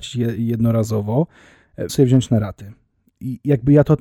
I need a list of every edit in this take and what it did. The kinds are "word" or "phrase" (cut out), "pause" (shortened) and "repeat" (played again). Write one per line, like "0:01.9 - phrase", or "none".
0:01.9 - word